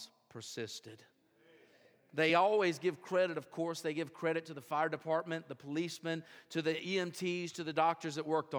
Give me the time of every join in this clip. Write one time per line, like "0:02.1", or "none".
none